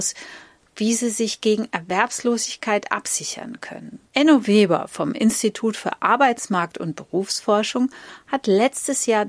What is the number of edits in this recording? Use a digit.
1